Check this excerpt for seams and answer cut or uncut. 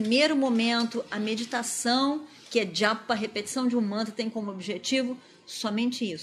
uncut